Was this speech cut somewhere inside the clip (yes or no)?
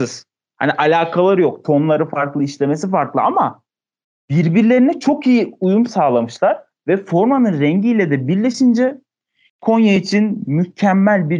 no